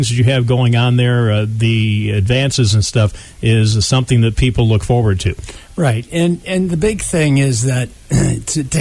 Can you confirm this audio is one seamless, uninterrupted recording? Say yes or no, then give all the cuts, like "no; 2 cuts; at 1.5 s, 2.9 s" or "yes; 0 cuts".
yes; 0 cuts